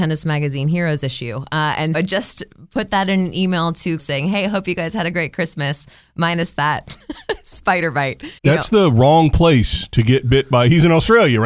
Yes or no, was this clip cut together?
yes